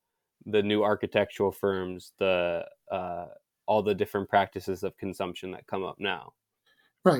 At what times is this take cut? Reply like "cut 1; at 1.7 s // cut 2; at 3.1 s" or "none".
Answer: none